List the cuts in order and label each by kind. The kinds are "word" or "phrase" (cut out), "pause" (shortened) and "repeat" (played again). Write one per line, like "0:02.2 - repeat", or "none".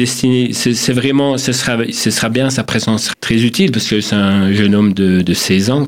0:03.1 - word